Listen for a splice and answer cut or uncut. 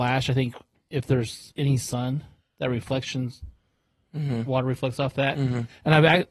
uncut